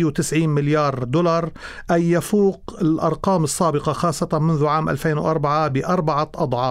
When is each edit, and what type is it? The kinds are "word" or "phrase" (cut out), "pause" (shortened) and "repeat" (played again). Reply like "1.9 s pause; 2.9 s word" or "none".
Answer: none